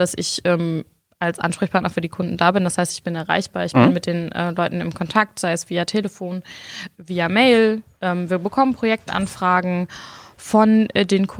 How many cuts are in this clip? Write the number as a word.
one